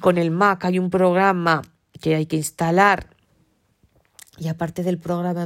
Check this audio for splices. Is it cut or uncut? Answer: uncut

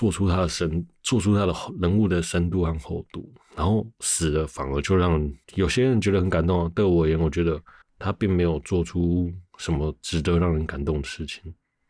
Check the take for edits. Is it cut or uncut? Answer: cut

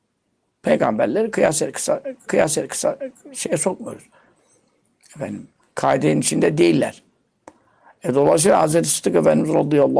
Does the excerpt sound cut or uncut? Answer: cut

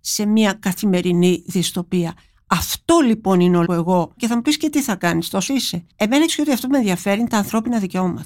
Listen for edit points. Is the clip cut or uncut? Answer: cut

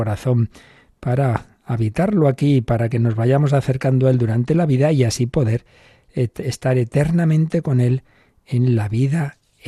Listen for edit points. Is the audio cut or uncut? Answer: uncut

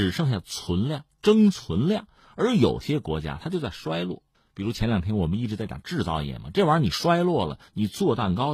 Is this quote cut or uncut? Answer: uncut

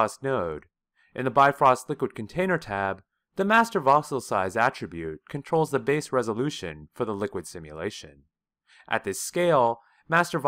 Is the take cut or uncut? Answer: uncut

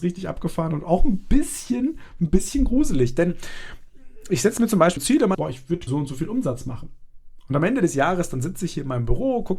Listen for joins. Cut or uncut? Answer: cut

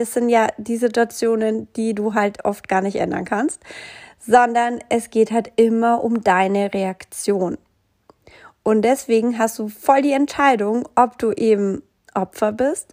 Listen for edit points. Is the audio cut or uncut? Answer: uncut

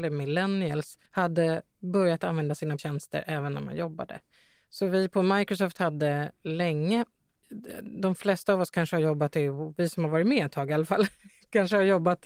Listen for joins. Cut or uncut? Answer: cut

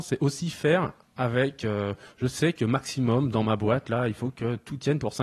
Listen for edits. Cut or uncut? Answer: uncut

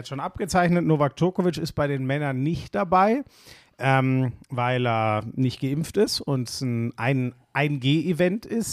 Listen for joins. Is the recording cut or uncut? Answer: uncut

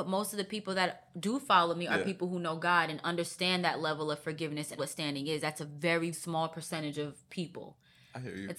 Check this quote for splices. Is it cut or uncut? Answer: cut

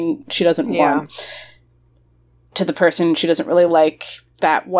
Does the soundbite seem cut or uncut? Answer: uncut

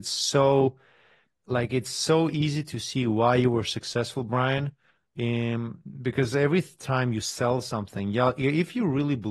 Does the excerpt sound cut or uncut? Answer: uncut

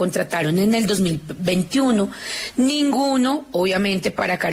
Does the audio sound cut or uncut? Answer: uncut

